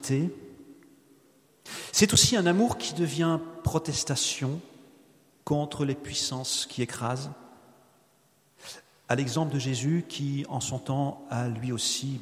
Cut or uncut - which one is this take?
uncut